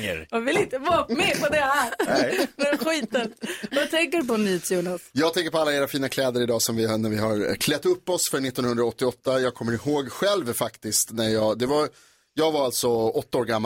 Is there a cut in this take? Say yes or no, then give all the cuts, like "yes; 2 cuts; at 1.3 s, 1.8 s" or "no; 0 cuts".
no; 0 cuts